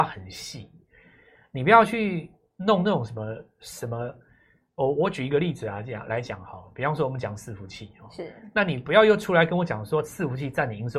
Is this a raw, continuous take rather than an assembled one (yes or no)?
yes